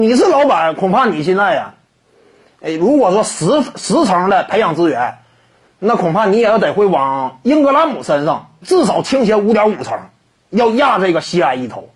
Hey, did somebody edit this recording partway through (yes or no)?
yes